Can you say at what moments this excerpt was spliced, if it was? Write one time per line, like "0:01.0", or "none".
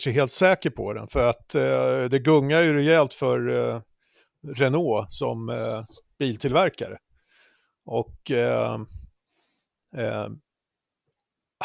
none